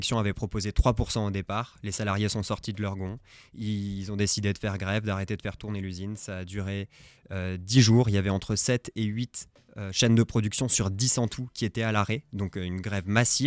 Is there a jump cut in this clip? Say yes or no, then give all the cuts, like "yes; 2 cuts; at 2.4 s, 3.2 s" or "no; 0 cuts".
no; 0 cuts